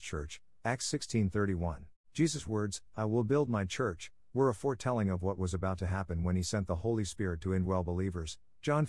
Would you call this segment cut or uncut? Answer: cut